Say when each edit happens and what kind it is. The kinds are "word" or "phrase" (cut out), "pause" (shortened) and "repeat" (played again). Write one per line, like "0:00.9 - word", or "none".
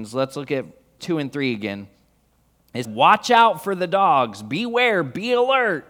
0:01.0 - word
0:02.8 - word